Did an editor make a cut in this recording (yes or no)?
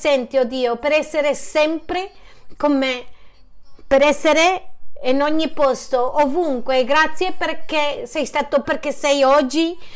yes